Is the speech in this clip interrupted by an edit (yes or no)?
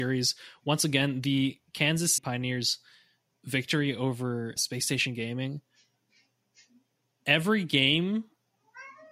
yes